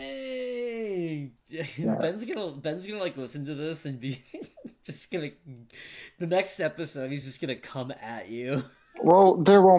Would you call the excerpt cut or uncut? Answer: uncut